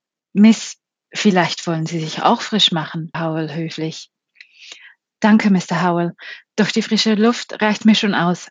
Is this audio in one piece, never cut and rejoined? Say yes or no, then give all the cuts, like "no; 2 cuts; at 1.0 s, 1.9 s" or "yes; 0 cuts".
no; 1 cut; at 3.1 s